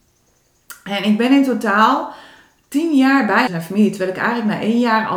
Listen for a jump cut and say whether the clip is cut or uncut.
cut